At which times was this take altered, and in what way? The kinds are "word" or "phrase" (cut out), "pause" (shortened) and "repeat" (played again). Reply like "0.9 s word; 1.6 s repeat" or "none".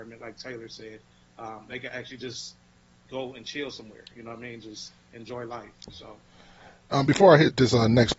none

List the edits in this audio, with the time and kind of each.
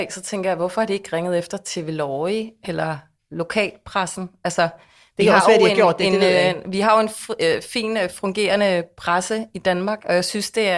none

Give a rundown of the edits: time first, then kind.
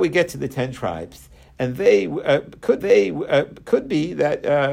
2.8 s repeat

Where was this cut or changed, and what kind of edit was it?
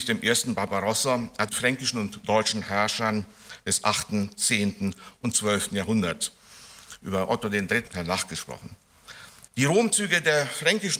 1.5 s word; 7.9 s phrase; 9.5 s pause

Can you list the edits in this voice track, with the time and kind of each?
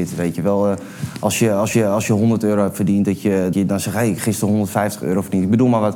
1.7 s repeat; 3.5 s word

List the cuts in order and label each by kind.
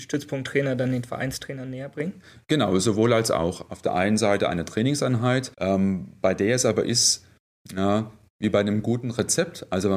5.5 s pause

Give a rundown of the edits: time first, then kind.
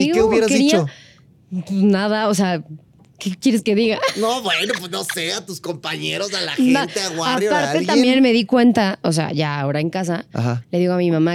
none

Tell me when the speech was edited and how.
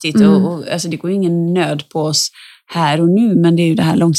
none

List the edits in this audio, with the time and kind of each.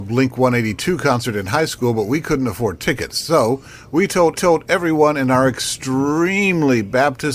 4.4 s repeat

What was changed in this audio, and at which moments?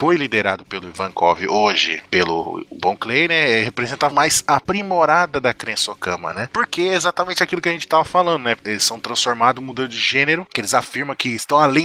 4.1 s word; 8.6 s word; 10.5 s word

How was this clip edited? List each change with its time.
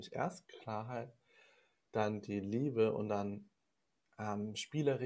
none

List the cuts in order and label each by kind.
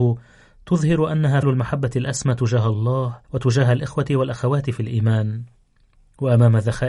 1.4 s word; 3.2 s pause

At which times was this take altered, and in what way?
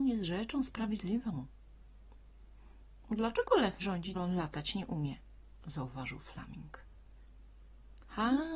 3.8 s phrase; 4.1 s word

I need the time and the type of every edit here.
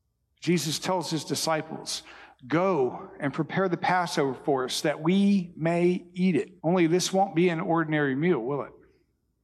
6.6 s pause

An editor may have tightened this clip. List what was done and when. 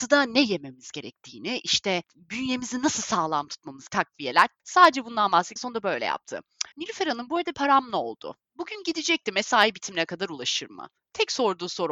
3.9 s phrase; 5.6 s phrase; 6.7 s pause; 7.5 s word; 8.4 s pause

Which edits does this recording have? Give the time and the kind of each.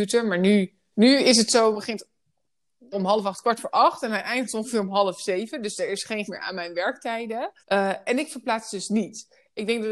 0.9 s word; 1.7 s phrase; 2.9 s word; 6.3 s word; 7.6 s pause

